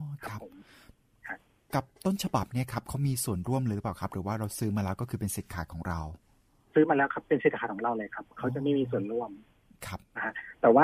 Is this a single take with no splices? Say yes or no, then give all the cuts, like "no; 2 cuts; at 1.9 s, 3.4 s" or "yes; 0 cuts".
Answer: yes; 0 cuts